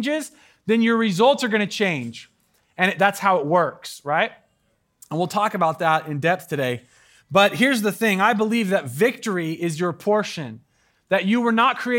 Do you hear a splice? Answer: no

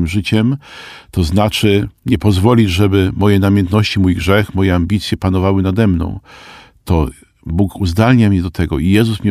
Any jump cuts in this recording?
no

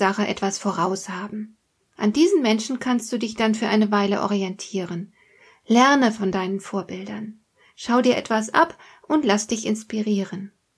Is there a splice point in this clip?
no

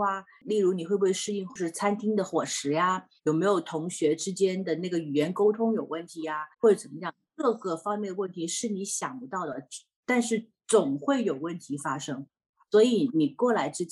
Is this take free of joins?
no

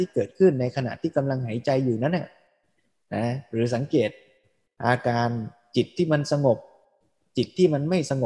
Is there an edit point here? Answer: no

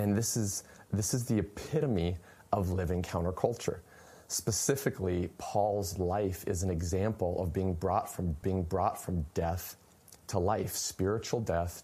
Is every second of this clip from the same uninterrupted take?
no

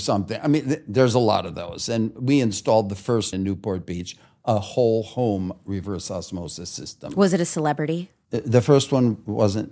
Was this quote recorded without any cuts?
no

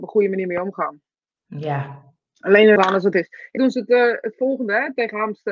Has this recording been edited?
yes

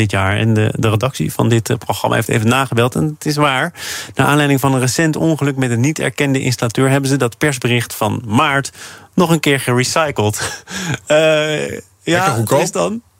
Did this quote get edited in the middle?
no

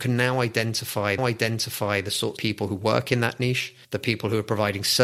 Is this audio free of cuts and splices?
no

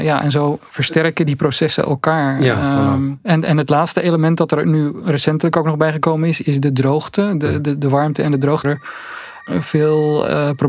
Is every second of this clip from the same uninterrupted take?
no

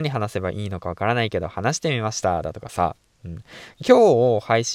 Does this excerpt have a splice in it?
no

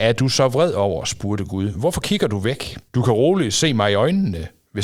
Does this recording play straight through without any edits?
no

